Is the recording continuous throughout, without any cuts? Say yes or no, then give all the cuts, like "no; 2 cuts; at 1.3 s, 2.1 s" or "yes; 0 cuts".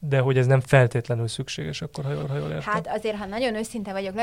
no; 1 cut; at 2.2 s